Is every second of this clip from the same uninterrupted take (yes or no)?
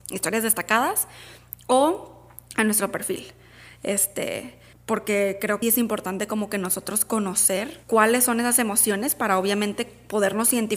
no